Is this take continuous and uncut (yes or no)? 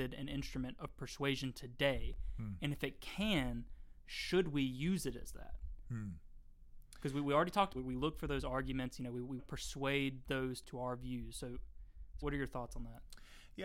no